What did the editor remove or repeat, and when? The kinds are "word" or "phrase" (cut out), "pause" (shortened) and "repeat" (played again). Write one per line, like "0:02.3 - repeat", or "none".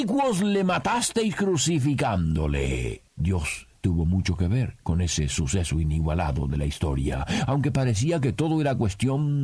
0:03.1 - pause